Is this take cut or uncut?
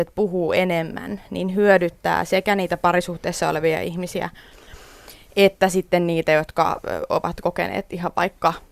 uncut